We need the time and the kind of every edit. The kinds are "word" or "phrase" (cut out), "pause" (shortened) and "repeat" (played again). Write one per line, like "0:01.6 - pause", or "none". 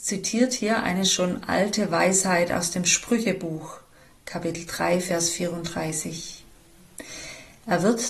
none